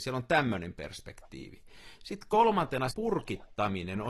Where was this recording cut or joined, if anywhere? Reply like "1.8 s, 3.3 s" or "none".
2.9 s